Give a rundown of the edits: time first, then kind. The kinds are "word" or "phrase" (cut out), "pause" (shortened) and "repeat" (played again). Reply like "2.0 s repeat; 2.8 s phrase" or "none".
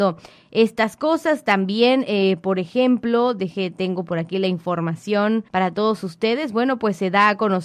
5.5 s pause